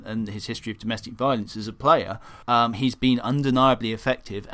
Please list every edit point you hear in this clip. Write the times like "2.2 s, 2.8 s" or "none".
2.4 s